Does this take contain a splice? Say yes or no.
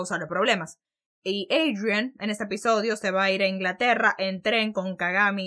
no